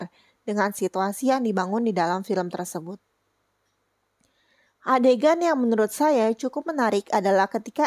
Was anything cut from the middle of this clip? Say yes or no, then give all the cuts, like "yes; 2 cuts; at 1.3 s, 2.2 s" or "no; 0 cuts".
no; 0 cuts